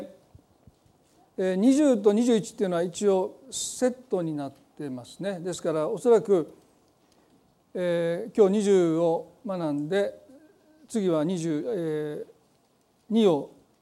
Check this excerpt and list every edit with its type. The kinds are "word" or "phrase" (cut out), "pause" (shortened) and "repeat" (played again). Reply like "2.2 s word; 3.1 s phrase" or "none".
none